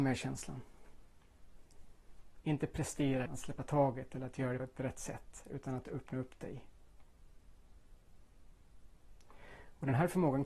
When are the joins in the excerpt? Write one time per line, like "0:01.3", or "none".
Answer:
0:03.3
0:04.6